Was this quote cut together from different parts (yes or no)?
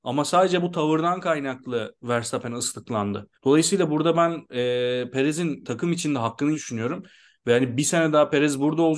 yes